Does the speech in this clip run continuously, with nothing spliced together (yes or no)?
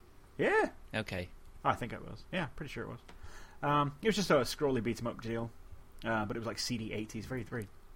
yes